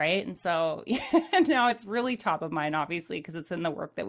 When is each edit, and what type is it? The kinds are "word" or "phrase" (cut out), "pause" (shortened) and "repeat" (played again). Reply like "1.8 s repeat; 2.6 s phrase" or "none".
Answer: none